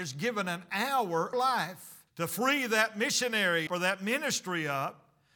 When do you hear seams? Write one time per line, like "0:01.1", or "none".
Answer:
0:01.3
0:02.1
0:03.7